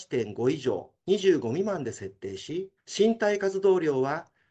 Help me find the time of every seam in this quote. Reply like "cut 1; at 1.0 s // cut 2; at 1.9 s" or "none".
cut 1; at 2.8 s